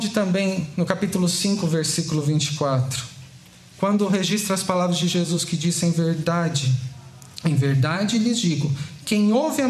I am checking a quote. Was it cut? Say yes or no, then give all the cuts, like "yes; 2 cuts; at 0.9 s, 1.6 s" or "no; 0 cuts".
no; 0 cuts